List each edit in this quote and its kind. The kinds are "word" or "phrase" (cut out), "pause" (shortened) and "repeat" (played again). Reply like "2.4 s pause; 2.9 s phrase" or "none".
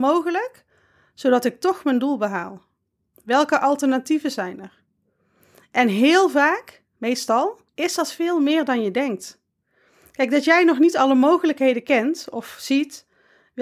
7.7 s pause